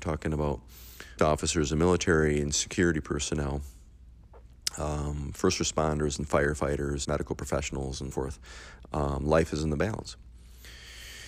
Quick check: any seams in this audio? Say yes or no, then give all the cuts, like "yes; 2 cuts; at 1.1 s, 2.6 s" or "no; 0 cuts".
yes; 3 cuts; at 1.2 s, 7.0 s, 8.1 s